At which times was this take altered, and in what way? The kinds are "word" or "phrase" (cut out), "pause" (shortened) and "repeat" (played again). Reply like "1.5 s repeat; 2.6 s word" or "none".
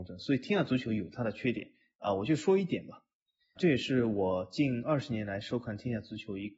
3.6 s word